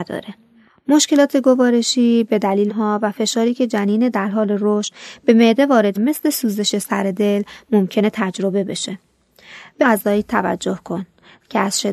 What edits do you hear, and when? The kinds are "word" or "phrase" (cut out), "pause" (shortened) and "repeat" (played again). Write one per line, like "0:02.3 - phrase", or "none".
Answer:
0:02.7 - word
0:06.0 - word
0:09.8 - word